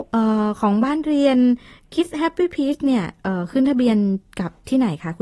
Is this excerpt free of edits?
yes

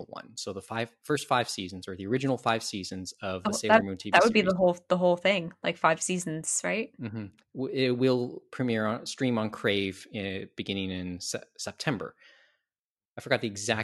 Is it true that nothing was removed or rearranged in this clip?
yes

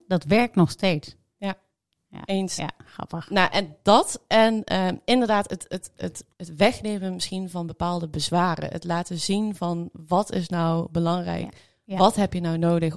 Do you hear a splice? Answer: yes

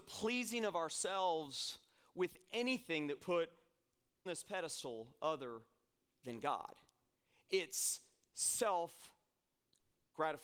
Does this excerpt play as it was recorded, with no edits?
no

